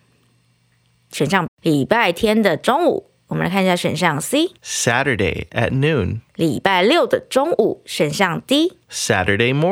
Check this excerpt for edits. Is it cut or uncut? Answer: cut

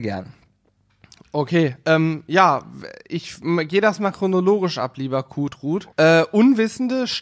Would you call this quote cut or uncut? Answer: cut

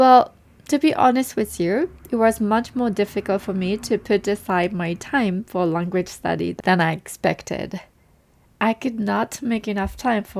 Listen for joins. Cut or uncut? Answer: uncut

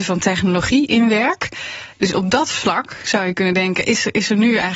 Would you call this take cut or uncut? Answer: uncut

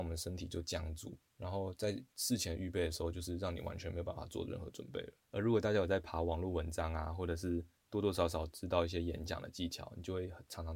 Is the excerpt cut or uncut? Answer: cut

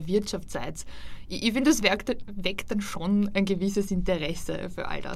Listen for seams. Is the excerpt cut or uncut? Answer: uncut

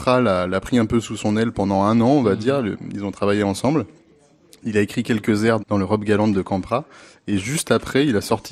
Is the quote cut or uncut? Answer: cut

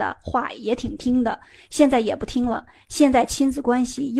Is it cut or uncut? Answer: uncut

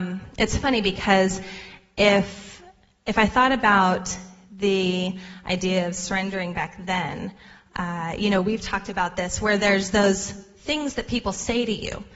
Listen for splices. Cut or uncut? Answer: uncut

